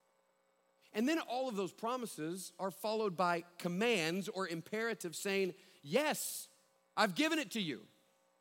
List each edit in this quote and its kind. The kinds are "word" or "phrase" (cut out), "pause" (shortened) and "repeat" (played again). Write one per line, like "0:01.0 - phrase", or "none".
none